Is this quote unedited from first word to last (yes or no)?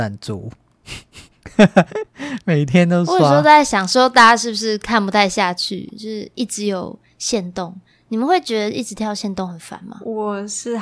yes